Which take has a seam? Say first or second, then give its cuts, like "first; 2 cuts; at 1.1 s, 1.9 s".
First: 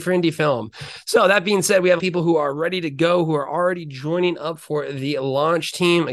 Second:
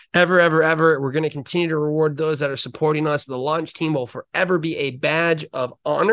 first; 1 cut; at 2.0 s